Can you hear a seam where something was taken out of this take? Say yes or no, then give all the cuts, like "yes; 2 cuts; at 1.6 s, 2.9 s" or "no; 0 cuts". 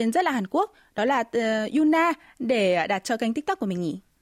no; 0 cuts